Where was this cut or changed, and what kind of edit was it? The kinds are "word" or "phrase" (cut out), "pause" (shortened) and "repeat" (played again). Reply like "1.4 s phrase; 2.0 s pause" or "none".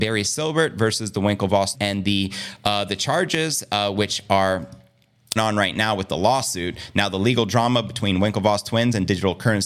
1.7 s word; 5.4 s phrase